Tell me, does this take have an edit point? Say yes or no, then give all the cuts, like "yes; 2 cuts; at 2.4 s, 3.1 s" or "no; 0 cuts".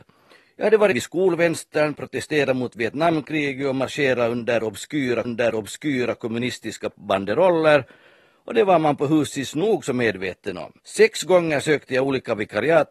yes; 3 cuts; at 0.9 s, 5.2 s, 10.8 s